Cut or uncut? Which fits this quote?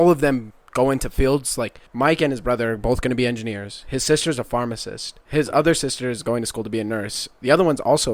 cut